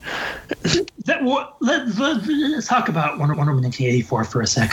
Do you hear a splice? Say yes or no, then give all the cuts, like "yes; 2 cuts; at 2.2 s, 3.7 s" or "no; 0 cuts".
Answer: yes; 1 cut; at 3.3 s